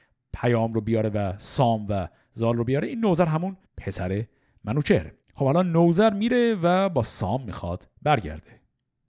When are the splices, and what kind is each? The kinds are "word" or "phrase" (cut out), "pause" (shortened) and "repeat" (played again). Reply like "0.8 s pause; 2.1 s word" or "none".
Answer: 3.7 s pause; 5.2 s pause

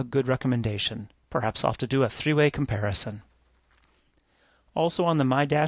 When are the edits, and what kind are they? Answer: none

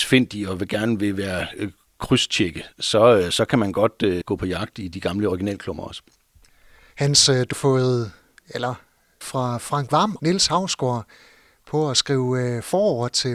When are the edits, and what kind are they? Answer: 4.2 s word; 7.5 s word; 9.2 s word; 10.2 s word

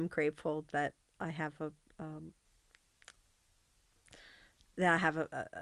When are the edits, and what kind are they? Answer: none

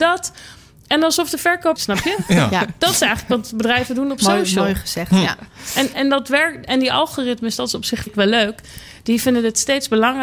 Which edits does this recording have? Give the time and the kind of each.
1.8 s phrase; 5.9 s word; 8.1 s word

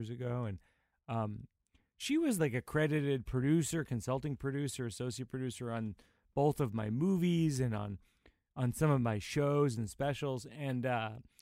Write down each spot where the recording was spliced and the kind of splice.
none

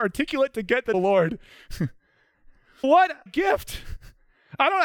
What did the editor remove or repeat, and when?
0.9 s phrase; 2.8 s word; 3.3 s word

